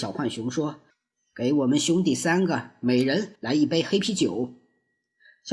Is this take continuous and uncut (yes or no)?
no